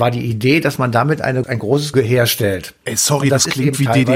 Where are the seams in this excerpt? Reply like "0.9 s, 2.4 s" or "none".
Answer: 1.4 s, 1.9 s